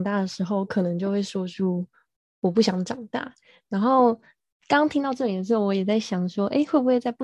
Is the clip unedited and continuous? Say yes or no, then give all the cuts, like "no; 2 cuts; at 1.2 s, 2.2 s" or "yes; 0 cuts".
yes; 0 cuts